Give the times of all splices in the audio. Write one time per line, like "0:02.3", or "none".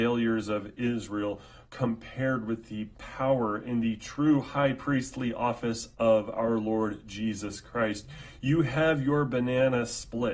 none